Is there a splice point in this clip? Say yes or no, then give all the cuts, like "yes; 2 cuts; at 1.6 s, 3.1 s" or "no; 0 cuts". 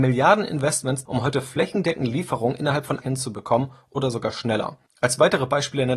yes; 2 cuts; at 1.1 s, 3.0 s